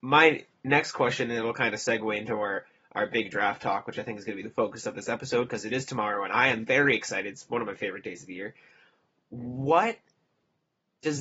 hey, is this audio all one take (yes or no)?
yes